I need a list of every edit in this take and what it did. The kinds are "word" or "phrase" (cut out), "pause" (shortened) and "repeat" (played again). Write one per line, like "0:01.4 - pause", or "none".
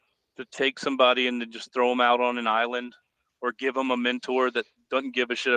none

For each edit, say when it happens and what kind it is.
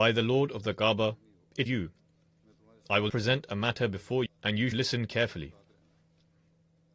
0:01.7 - word
0:03.1 - word
0:04.3 - word
0:04.7 - word

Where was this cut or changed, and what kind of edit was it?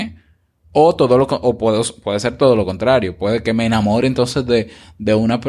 none

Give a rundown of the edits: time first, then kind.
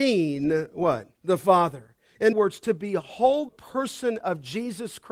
0:01.1 - pause
0:02.3 - word
0:03.5 - word

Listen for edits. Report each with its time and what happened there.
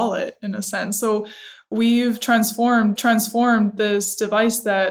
0:03.0 - repeat

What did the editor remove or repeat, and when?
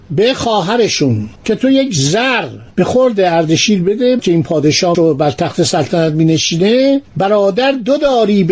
0:01.4 - pause
0:02.7 - pause
0:04.2 - word
0:04.9 - word
0:07.1 - pause

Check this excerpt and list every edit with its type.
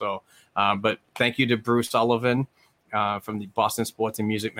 none

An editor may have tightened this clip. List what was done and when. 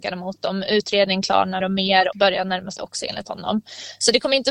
0:01.6 - word
0:02.1 - word
0:02.8 - phrase

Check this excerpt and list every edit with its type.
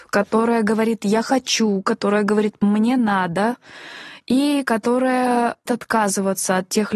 0:05.7 - word

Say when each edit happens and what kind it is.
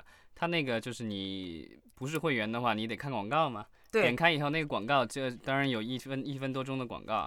none

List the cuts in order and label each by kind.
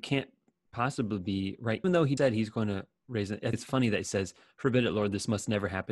0:01.8 - word
0:02.2 - word
0:03.5 - word

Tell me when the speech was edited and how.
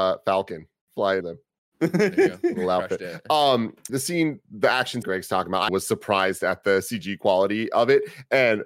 0:01.2 - word
0:03.9 - word
0:05.0 - phrase
0:05.7 - word

